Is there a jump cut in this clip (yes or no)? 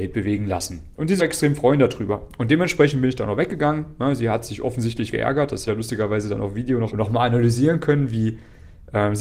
yes